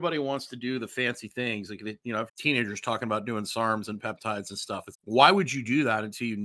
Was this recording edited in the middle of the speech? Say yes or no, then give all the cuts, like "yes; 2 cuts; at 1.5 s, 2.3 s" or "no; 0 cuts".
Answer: yes; 2 cuts; at 2.3 s, 4.9 s